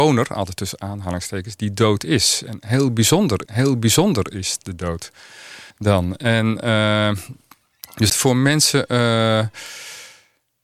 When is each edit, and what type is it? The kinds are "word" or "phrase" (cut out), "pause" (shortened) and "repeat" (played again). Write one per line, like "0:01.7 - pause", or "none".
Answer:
0:03.5 - repeat
0:05.7 - pause
0:08.1 - phrase